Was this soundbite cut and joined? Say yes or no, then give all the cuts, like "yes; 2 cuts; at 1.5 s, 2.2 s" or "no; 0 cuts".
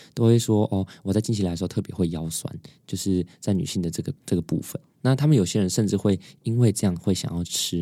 yes; 1 cut; at 4.2 s